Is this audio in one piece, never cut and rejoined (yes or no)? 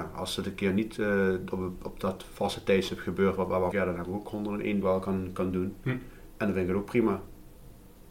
no